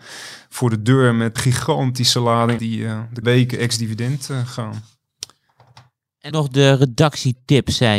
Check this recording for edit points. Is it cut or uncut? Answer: cut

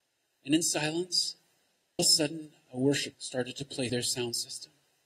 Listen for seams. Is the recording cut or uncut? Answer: cut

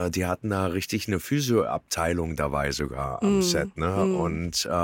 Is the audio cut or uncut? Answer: uncut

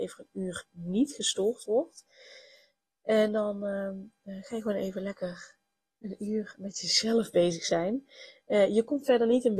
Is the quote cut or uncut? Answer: uncut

